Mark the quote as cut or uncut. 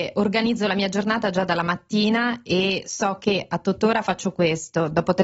uncut